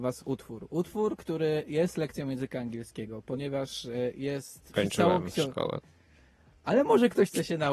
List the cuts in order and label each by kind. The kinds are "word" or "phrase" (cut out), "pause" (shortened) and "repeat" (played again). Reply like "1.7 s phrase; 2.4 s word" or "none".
4.7 s word